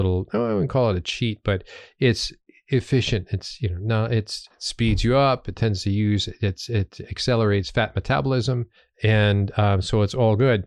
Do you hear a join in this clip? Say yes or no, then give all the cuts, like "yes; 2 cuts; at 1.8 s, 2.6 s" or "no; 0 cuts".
yes; 1 cut; at 8.8 s